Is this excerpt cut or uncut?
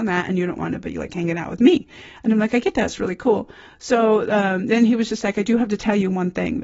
uncut